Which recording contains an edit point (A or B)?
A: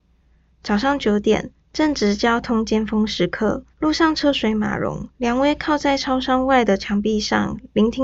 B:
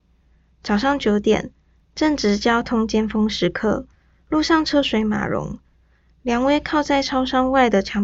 A